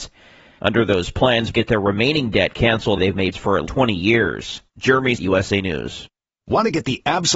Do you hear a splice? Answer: yes; 5 cuts; at 1.5 s, 3.0 s, 3.3 s, 3.7 s, 5.2 s

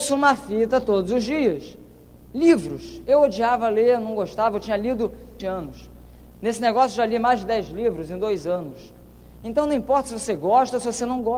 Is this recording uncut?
no; 1 cut; at 5.4 s

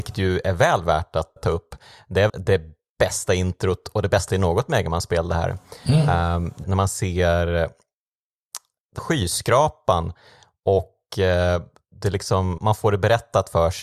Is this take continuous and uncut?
no; 6 cuts; at 1.4 s, 2.3 s, 4.3 s, 6.6 s, 9.0 s, 12.6 s

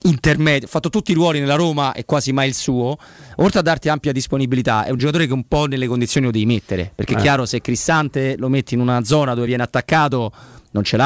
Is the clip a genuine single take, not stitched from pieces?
yes; 0 cuts

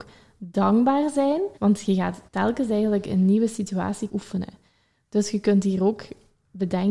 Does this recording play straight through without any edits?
no; 3 cuts; at 1.6 s, 2.3 s, 4.1 s

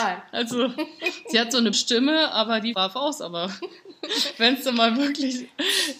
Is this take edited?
yes; 2 cuts; at 1.7 s, 2.7 s

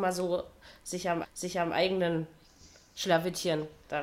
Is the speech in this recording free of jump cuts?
no; 1 cut; at 1.2 s

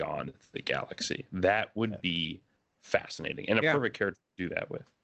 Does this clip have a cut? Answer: no; 0 cuts

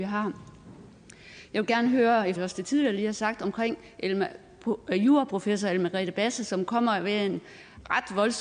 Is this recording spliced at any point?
yes; 1 cut; at 2.4 s

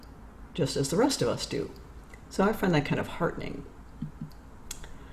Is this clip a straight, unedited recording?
yes; 0 cuts

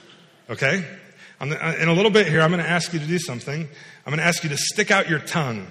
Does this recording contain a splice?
no; 0 cuts

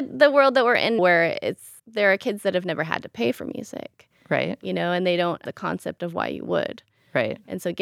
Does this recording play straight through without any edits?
no; 3 cuts; at 1.0 s, 1.8 s, 5.5 s

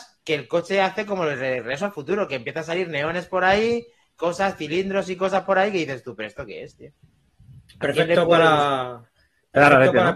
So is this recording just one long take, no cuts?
yes; 0 cuts

